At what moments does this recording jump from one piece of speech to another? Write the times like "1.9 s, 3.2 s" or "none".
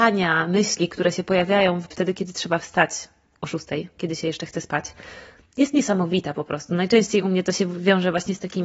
1.9 s